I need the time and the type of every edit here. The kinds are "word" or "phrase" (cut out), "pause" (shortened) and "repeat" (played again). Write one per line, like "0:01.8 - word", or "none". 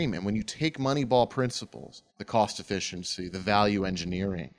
0:02.1 - pause